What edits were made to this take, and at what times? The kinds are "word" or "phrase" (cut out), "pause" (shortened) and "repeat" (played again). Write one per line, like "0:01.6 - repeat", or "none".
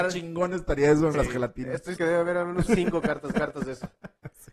0:01.1 - phrase
0:02.0 - word
0:02.7 - word
0:03.3 - repeat